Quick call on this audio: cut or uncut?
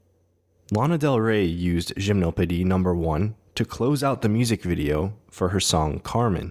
uncut